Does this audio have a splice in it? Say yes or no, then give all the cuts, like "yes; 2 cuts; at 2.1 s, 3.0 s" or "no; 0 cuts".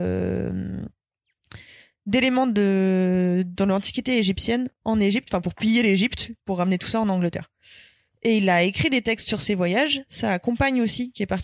no; 0 cuts